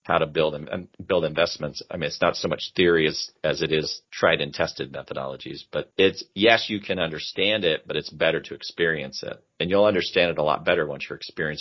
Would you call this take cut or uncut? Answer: uncut